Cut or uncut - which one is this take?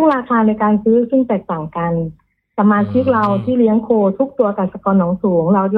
uncut